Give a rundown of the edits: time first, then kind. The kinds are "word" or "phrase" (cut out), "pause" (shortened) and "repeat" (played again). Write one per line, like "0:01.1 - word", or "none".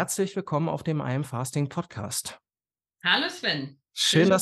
none